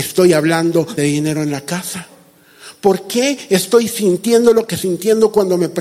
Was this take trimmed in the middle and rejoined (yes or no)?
yes